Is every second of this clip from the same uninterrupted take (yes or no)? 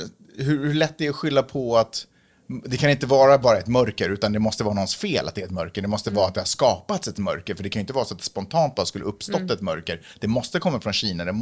yes